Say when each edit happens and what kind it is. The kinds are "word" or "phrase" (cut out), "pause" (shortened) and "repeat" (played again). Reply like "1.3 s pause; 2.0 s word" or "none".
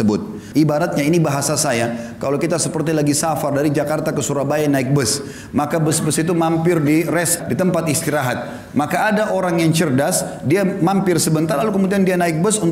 7.4 s word